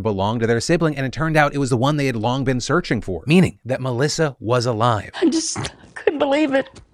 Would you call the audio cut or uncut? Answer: uncut